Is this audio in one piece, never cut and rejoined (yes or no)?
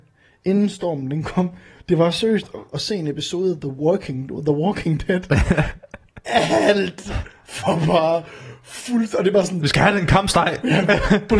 no